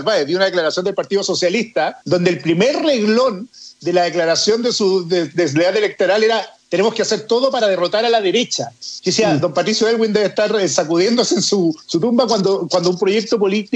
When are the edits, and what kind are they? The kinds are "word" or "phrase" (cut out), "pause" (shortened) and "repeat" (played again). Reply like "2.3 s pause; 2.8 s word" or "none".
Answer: 2.0 s pause; 11.8 s pause